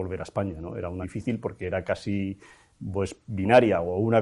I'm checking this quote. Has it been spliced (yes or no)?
yes